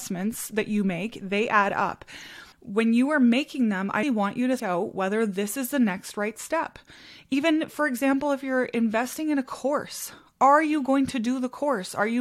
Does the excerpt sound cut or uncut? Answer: cut